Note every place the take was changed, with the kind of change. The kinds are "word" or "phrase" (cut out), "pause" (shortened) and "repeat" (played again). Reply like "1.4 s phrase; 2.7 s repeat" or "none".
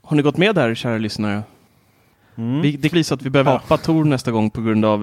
2.9 s word; 3.5 s word